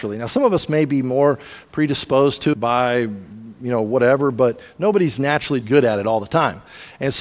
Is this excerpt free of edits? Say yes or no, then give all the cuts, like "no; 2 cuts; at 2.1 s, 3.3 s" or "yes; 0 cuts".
no; 2 cuts; at 2.5 s, 5.6 s